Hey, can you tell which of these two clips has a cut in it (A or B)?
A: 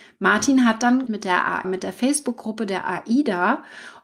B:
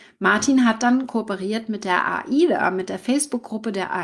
A